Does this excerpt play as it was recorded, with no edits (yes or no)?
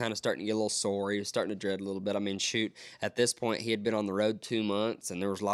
yes